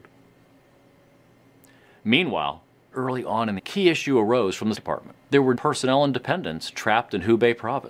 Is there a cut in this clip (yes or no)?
yes